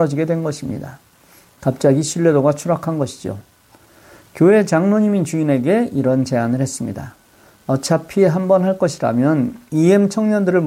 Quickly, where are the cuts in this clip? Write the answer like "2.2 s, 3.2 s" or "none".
none